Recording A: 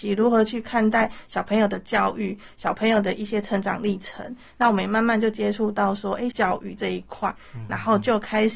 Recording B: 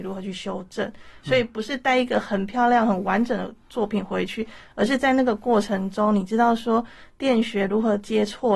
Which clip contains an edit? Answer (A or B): A